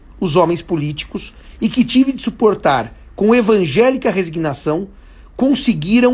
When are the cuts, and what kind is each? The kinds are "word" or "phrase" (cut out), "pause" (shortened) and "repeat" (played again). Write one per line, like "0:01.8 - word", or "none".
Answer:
none